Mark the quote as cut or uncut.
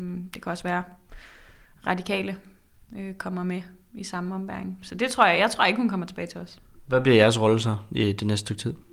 uncut